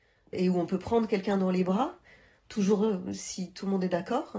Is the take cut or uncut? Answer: uncut